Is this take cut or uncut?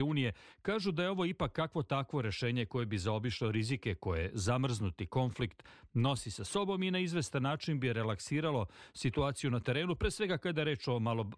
uncut